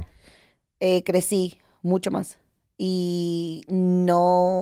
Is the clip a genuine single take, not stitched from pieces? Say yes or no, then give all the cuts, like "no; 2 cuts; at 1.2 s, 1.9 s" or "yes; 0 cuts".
yes; 0 cuts